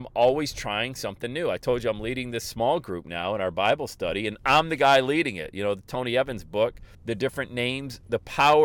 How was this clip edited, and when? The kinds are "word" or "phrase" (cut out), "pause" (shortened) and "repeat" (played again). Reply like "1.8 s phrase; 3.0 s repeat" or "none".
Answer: 6.9 s pause